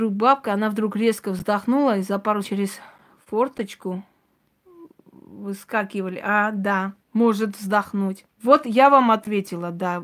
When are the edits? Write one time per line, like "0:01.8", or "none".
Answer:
0:02.4
0:07.0
0:08.3